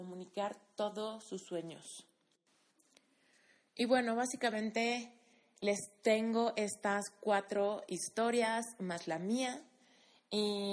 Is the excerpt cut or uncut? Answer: uncut